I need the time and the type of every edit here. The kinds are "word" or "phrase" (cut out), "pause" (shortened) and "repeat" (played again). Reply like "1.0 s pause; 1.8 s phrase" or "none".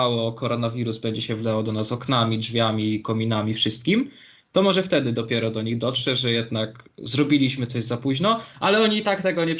none